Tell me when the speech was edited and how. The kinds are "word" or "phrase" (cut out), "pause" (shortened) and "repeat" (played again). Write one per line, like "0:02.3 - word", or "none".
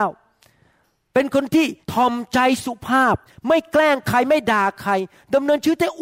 0:01.8 - pause
0:03.3 - pause